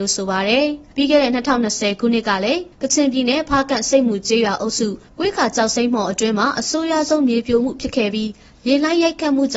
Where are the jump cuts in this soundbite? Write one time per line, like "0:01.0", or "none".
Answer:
0:00.9
0:02.7